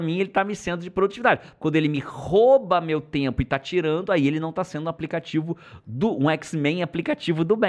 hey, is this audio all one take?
yes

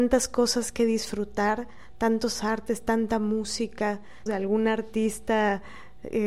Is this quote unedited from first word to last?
no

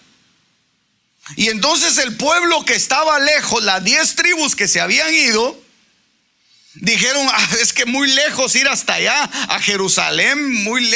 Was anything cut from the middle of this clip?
no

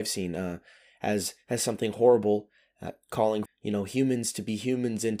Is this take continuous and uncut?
no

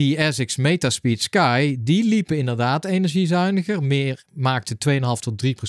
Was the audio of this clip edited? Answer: no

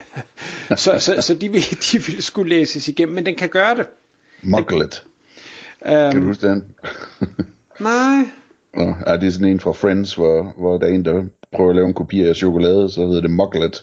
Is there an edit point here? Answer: no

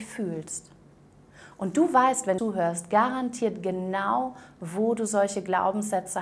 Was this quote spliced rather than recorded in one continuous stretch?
yes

